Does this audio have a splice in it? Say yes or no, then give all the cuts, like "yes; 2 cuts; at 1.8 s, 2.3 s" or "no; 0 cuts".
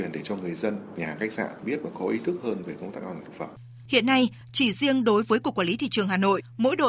yes; 1 cut; at 0.9 s